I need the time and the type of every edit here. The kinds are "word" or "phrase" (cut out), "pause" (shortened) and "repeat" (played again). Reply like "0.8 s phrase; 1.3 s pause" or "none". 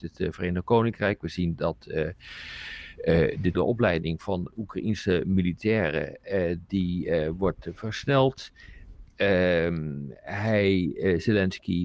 3.5 s word

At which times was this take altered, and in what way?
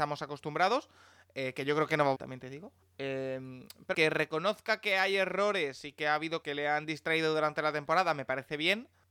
2.1 s word; 2.8 s pause; 3.9 s word; 6.4 s word

